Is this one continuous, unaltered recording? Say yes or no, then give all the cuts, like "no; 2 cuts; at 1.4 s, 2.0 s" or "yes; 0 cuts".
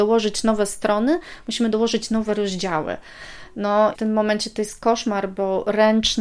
no; 1 cut; at 3.9 s